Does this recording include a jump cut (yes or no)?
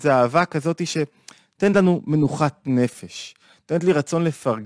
no